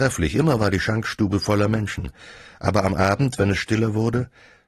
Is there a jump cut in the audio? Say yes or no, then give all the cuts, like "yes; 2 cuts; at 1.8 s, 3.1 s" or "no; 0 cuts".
no; 0 cuts